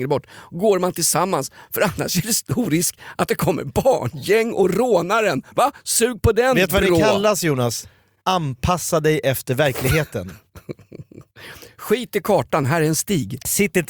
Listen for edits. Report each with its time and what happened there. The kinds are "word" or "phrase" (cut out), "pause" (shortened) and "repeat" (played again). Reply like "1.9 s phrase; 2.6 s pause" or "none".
none